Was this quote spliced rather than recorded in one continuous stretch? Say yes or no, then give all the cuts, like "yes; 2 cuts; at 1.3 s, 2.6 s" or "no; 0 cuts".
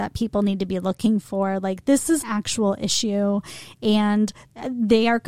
yes; 1 cut; at 2.2 s